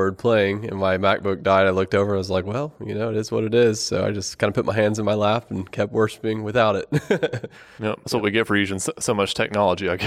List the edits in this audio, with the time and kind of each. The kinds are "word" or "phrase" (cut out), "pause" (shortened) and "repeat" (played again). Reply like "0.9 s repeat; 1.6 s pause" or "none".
8.0 s pause